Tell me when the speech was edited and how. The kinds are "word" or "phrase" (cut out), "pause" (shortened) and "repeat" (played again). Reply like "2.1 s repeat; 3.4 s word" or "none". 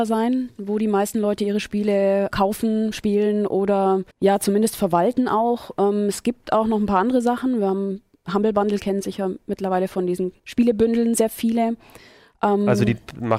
2.3 s word; 4.1 s pause; 10.4 s pause